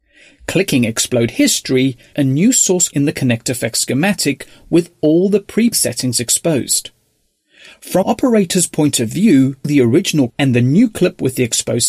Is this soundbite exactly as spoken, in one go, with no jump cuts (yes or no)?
no